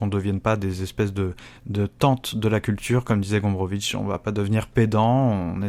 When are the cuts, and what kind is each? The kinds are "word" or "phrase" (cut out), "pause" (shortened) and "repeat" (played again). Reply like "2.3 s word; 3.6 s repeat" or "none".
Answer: 1.6 s pause